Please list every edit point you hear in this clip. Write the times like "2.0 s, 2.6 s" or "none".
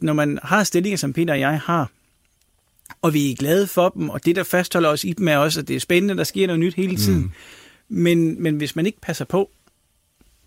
none